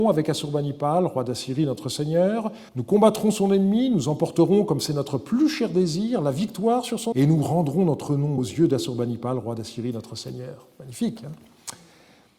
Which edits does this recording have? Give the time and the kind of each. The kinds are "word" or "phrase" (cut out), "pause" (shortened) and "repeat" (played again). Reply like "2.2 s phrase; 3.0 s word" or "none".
2.7 s pause; 7.1 s word; 8.4 s word